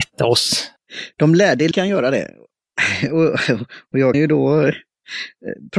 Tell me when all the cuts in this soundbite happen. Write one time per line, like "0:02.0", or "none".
0:01.7
0:04.1